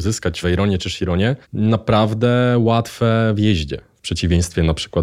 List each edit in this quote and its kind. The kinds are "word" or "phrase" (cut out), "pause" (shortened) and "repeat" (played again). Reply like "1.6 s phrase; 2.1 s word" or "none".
1.4 s pause